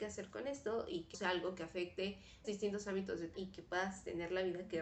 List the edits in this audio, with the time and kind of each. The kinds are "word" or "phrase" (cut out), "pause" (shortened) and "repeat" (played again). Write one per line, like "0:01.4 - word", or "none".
0:01.1 - word
0:02.4 - word
0:03.3 - word